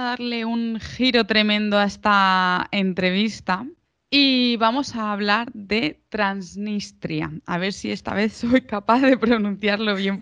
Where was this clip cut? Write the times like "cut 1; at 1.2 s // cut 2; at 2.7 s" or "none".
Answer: cut 1; at 3.9 s

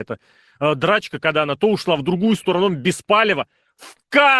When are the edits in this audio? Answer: cut 1; at 2.0 s

